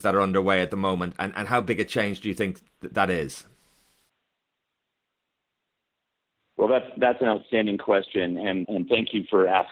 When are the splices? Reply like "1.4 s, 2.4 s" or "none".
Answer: 8.6 s